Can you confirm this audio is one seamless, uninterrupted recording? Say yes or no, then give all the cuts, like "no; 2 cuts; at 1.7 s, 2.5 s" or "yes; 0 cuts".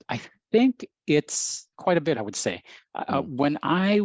no; 2 cuts; at 1.7 s, 2.1 s